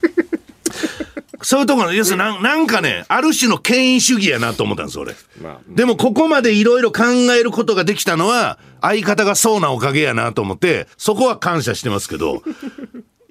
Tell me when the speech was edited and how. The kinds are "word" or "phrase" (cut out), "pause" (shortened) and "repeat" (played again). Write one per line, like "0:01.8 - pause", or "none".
0:05.2 - pause
0:10.9 - pause